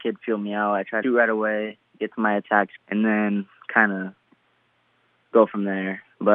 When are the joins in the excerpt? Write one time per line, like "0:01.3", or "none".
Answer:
0:01.0
0:02.8